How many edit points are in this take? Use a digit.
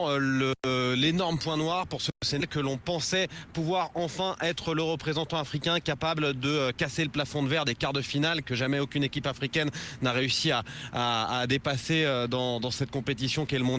1